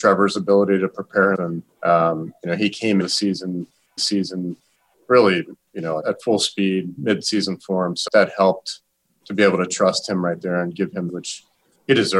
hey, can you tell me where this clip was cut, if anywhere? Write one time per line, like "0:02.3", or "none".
0:01.3
0:01.7
0:03.0
0:04.0
0:06.0
0:08.1
0:11.1